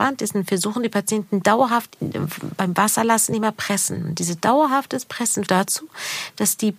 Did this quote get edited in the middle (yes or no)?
yes